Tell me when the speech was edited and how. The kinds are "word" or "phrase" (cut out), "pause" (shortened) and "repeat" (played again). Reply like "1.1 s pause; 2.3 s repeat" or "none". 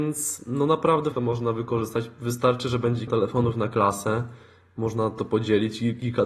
1.1 s word; 3.1 s word; 5.2 s word